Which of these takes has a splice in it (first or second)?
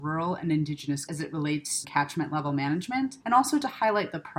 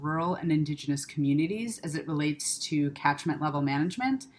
first